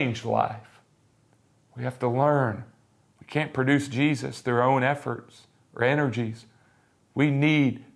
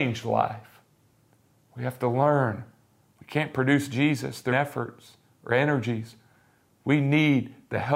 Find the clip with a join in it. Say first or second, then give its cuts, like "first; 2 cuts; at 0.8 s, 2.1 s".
second; 1 cut; at 4.5 s